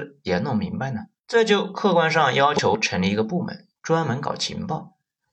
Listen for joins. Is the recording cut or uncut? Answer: cut